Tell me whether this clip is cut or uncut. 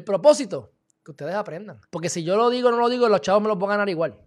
cut